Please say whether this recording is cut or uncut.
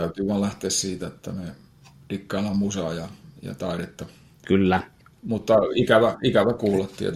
uncut